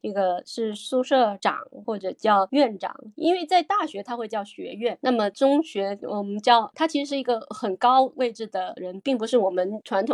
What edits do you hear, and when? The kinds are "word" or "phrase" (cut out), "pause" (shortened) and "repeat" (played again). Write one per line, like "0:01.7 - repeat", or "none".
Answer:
0:06.7 - word